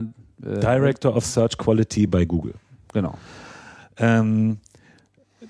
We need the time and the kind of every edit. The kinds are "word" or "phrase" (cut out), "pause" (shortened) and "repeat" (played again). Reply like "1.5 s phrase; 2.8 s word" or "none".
none